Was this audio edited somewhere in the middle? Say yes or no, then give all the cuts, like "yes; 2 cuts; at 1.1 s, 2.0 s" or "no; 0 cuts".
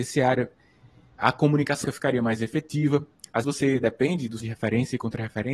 yes; 3 cuts; at 1.8 s, 3.4 s, 4.4 s